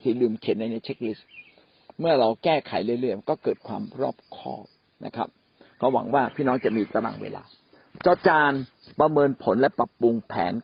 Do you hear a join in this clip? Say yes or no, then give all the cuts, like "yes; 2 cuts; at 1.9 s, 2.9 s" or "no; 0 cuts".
no; 0 cuts